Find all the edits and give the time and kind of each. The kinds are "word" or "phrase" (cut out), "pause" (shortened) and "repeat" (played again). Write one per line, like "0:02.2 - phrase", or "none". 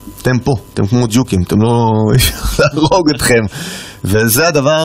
none